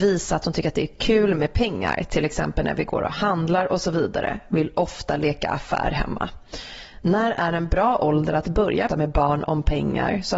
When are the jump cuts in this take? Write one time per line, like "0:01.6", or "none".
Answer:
0:08.9